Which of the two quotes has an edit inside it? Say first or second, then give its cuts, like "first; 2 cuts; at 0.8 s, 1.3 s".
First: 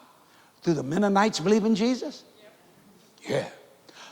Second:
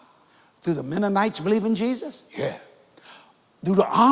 second; 1 cut; at 2.3 s